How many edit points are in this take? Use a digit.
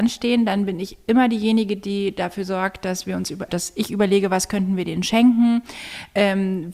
1